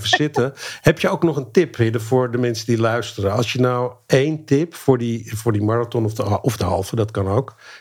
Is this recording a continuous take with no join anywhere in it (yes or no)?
yes